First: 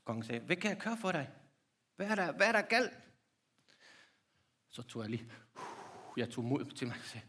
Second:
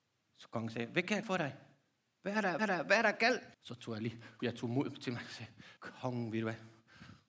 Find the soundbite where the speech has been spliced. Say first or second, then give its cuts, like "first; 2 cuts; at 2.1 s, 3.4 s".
second; 5 cuts; at 1.2 s, 2.6 s, 3.5 s, 4.4 s, 5.8 s